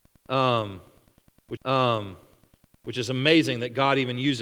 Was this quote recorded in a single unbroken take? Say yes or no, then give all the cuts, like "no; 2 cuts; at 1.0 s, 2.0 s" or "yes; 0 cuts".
no; 1 cut; at 1.6 s